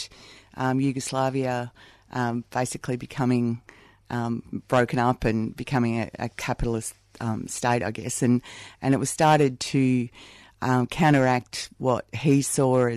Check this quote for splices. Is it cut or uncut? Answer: uncut